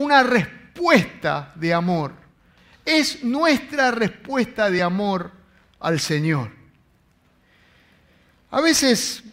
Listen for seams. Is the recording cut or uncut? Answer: uncut